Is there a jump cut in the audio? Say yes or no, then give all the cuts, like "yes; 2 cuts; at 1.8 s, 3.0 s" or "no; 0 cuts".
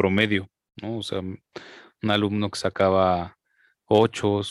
no; 0 cuts